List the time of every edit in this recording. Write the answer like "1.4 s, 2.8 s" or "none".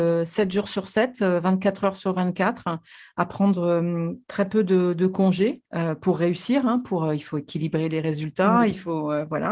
5.7 s

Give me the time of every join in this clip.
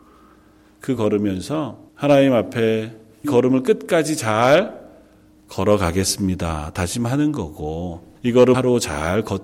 1.0 s, 1.9 s, 3.2 s, 8.2 s, 8.5 s

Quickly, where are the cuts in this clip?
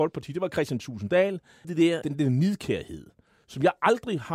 1.6 s, 2.0 s

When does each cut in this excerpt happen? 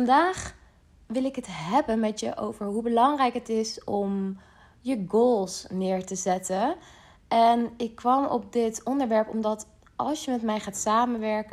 none

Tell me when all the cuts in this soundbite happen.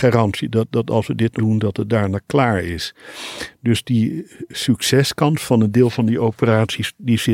1.4 s

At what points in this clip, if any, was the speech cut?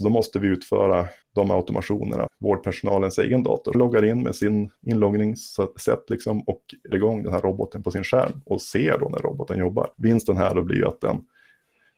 1.2 s, 2.3 s, 3.7 s, 4.8 s, 6.9 s, 9.9 s

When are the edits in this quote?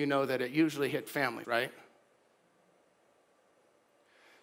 1.1 s, 1.4 s

